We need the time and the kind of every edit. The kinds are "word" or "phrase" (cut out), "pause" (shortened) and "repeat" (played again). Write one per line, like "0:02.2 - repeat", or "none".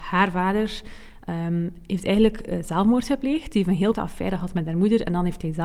0:03.9 - word